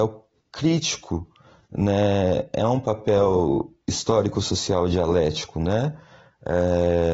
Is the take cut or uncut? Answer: uncut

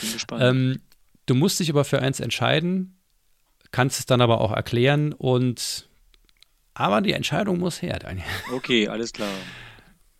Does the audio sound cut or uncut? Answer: uncut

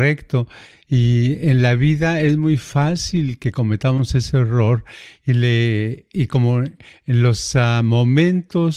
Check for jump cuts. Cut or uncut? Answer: uncut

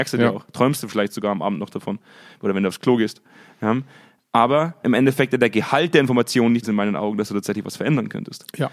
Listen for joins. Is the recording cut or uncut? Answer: cut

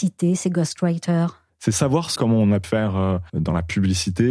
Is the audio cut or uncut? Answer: cut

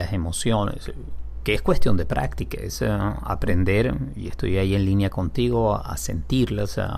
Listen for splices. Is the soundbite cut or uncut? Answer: uncut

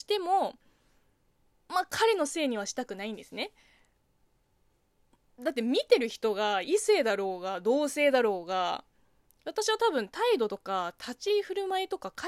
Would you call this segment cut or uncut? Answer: uncut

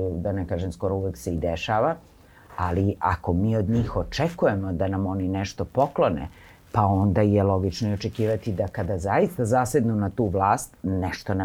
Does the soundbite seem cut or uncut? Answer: uncut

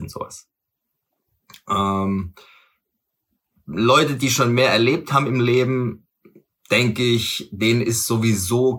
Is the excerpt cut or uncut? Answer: uncut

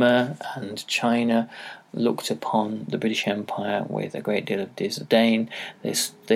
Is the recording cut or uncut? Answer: uncut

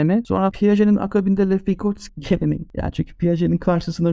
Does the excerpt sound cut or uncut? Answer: uncut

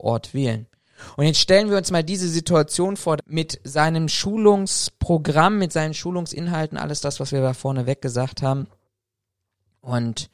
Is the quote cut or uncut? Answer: cut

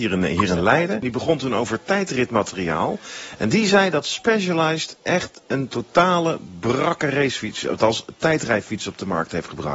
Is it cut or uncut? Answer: uncut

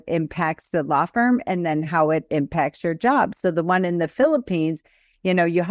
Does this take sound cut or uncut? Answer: uncut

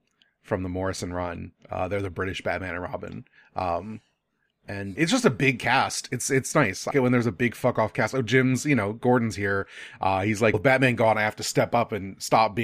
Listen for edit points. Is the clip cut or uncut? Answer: cut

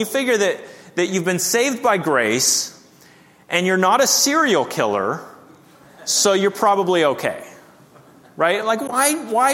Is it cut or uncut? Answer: uncut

